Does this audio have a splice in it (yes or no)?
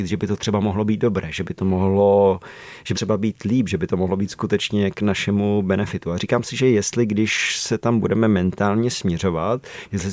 yes